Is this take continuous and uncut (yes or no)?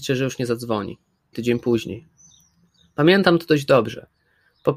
no